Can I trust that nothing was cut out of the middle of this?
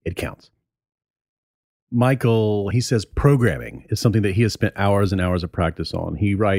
no; 1 cut; at 2.7 s

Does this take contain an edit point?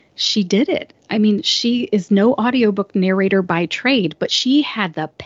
no; 0 cuts

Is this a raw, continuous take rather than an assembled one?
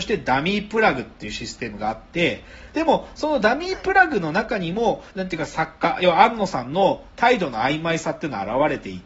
no; 1 cut; at 5.1 s

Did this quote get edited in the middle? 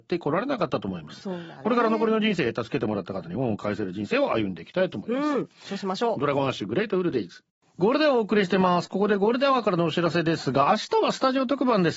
no; 0 cuts

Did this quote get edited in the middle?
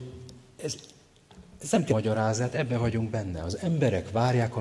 yes; 1 cut; at 1.9 s

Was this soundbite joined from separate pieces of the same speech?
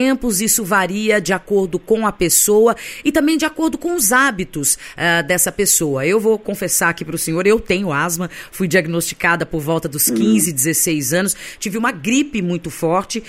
no; 0 cuts

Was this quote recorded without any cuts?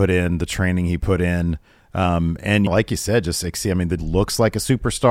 no; 2 cuts; at 2.7 s, 4.0 s

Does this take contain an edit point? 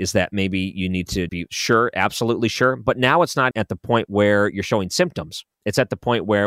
yes; 3 cuts; at 1.3 s, 3.5 s, 5.5 s

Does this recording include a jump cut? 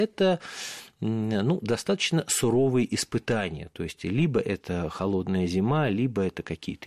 no; 0 cuts

